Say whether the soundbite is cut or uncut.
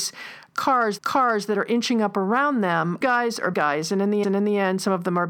cut